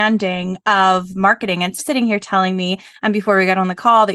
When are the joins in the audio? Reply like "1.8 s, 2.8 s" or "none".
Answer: 1.8 s